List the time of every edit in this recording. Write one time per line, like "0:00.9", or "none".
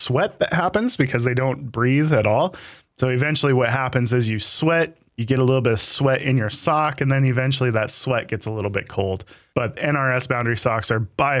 none

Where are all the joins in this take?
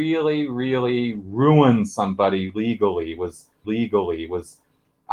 0:03.6

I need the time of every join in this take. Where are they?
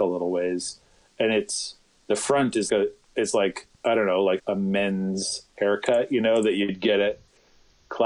0:02.0
0:02.7
0:03.0
0:03.7
0:04.4

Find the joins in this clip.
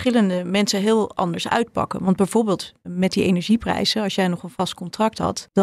none

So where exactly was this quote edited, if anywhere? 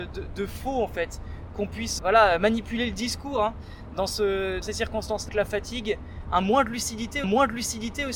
0:02.0
0:04.6
0:05.3
0:07.2

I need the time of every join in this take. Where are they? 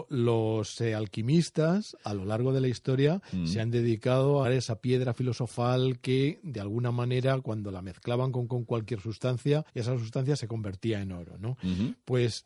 0:04.4
0:08.5
0:09.7

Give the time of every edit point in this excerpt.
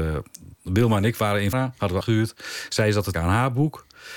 0:01.5
0:02.0
0:03.1

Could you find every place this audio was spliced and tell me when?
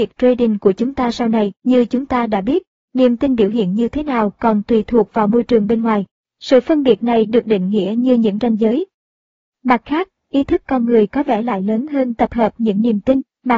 0:01.6

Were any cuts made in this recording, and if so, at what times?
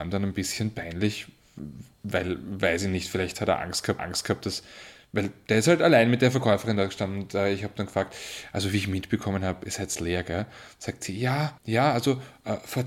0:04.0
0:11.6

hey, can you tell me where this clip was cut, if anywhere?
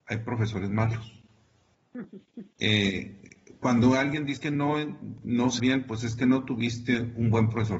0:04.4
0:05.6

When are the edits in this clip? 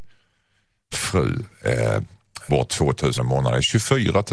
0:00.9
0:02.5
0:03.2

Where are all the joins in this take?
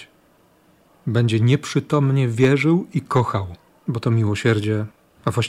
0:03.7

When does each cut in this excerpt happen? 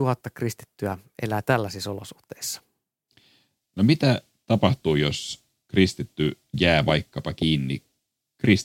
none

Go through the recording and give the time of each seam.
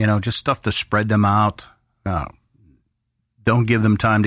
none

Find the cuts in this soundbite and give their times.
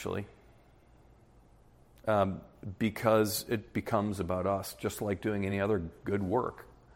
none

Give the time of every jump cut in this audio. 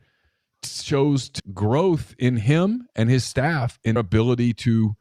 0:01.4
0:04.0

